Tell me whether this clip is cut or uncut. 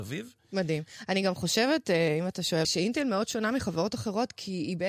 cut